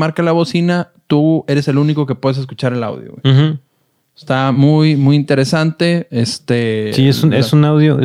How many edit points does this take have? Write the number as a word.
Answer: zero